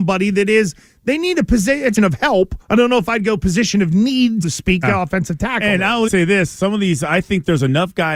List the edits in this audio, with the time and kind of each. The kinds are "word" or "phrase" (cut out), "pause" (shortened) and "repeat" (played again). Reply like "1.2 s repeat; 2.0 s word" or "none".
2.0 s phrase; 2.6 s pause; 4.4 s word; 4.8 s word; 6.1 s word